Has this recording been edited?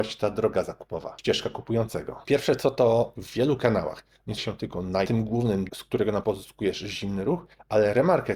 yes; 4 cuts; at 3.2 s, 4.4 s, 5.0 s, 6.2 s

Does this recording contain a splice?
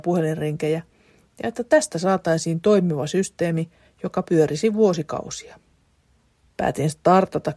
no; 0 cuts

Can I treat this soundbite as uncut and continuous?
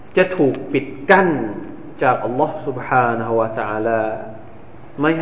yes; 0 cuts

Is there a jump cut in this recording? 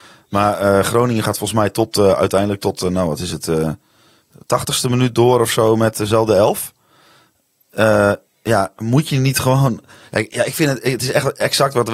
no; 0 cuts

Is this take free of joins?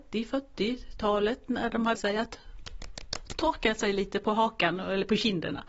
no; 1 cut; at 1.9 s

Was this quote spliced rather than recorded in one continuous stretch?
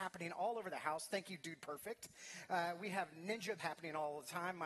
yes; 1 cut; at 3.6 s

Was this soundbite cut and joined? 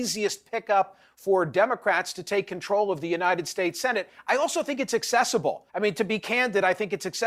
yes; 1 cut; at 5.7 s

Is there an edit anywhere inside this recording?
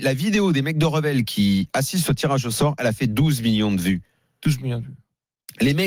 no; 0 cuts

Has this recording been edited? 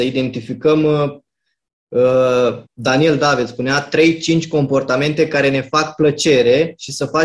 yes; 1 cut; at 2.7 s

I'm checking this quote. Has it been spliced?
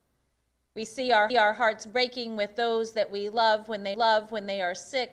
yes; 2 cuts; at 1.3 s, 3.9 s

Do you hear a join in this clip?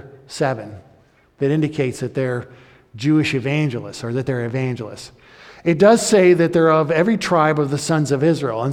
no; 0 cuts

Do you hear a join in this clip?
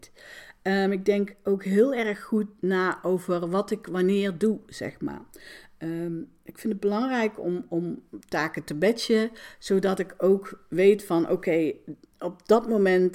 no; 0 cuts

